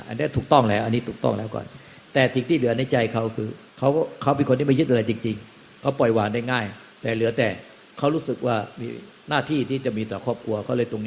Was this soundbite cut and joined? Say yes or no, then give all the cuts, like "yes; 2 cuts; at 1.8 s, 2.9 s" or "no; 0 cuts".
yes; 4 cuts; at 3.7 s, 6.9 s, 7.8 s, 9.2 s